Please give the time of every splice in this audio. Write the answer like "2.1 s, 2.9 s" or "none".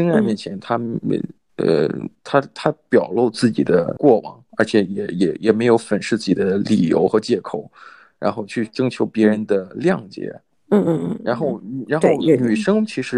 4.5 s